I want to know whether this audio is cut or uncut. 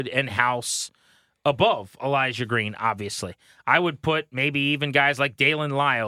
uncut